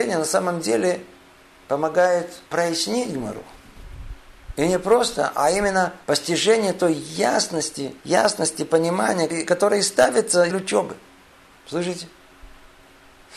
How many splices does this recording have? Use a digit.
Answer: 4